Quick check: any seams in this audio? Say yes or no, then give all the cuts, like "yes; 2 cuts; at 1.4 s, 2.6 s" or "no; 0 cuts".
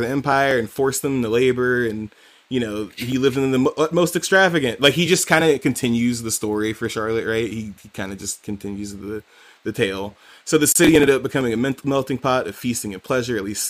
no; 0 cuts